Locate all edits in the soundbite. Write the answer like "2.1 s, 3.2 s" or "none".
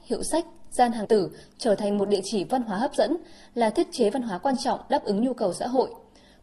1.0 s